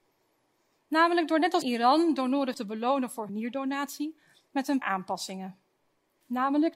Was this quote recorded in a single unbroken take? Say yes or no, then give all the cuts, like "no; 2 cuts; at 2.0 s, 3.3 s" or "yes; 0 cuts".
no; 4 cuts; at 1.6 s, 2.5 s, 3.3 s, 4.8 s